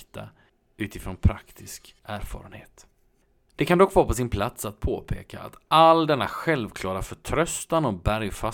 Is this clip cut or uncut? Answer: cut